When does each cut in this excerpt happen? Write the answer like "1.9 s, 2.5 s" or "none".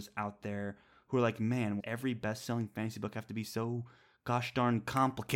1.8 s

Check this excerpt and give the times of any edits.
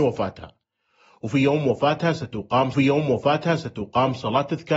2.7 s

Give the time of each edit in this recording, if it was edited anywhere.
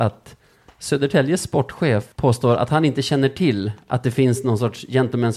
2.1 s

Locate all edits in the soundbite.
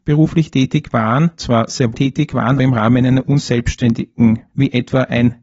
1.4 s, 1.9 s, 2.6 s, 4.5 s

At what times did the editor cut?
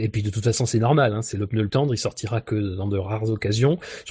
1.7 s

